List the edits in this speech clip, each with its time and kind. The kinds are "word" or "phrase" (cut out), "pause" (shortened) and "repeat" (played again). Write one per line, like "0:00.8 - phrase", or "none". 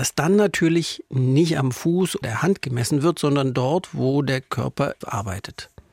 0:02.2 - word
0:05.0 - word